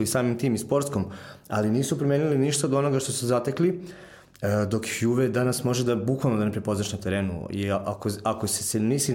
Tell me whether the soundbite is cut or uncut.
uncut